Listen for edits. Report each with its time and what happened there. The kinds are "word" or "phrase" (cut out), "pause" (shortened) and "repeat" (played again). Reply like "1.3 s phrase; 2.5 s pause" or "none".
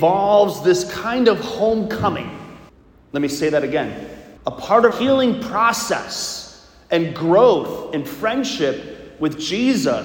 2.7 s pause; 4.4 s pause; 4.9 s word